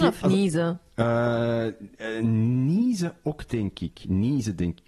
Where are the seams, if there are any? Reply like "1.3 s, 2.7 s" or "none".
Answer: none